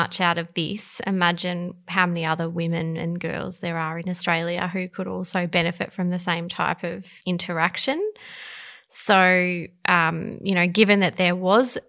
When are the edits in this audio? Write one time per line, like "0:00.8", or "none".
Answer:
0:07.2